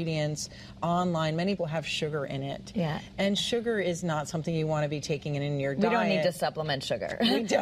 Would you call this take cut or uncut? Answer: cut